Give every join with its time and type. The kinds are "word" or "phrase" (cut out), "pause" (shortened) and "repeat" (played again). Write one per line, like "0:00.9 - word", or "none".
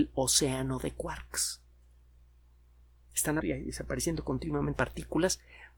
0:03.4 - word
0:04.8 - word